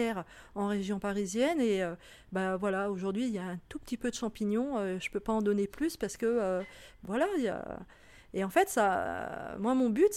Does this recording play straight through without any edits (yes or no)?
yes